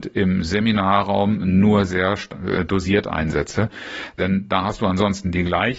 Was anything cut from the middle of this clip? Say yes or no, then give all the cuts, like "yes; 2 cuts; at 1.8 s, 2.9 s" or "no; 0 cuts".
yes; 1 cut; at 1.9 s